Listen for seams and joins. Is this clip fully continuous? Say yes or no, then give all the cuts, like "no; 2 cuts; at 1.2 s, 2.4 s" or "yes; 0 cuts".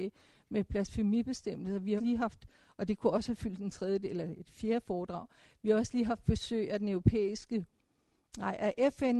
no; 1 cut; at 2.0 s